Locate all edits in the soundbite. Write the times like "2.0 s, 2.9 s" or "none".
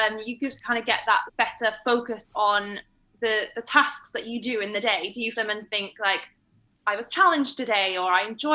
1.3 s, 5.3 s